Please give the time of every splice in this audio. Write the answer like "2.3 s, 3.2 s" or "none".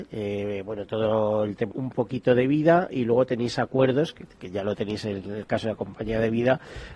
1.7 s